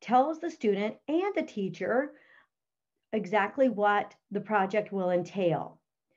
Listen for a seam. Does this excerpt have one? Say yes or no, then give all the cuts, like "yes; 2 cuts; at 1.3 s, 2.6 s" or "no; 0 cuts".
no; 0 cuts